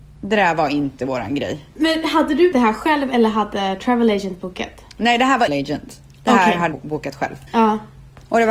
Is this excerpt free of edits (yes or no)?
no